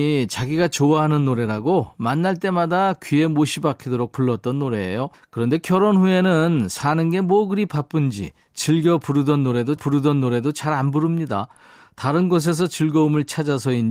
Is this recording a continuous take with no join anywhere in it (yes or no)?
no